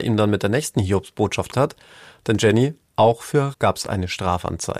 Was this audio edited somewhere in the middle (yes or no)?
yes